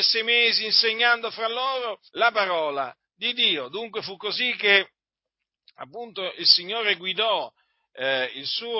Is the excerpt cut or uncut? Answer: cut